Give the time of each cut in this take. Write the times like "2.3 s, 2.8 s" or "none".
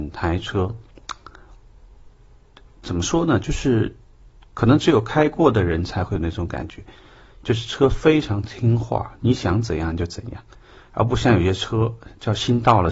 2.6 s